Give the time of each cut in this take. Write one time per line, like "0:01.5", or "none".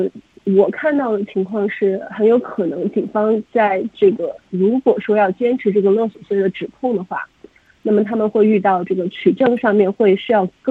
none